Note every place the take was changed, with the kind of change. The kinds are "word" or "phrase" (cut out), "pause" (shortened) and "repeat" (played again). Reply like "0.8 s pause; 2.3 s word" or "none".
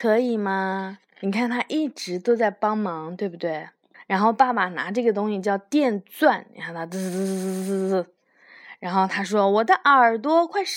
1.1 s pause; 3.9 s pause